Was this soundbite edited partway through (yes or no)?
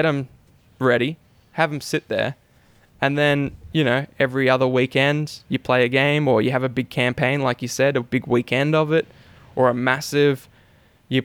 no